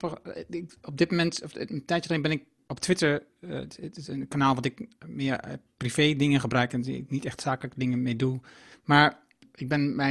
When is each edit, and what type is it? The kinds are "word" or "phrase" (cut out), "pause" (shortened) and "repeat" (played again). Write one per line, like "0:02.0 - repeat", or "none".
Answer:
none